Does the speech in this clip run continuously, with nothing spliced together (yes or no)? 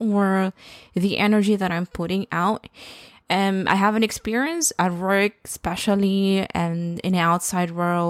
yes